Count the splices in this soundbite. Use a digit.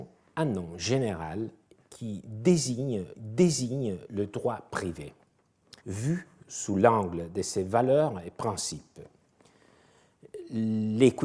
2